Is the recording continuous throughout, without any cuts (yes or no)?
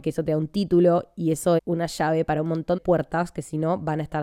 no